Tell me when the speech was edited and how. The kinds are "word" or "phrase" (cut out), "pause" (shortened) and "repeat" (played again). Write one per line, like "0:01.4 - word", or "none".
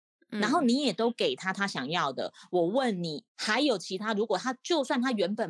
0:03.3 - pause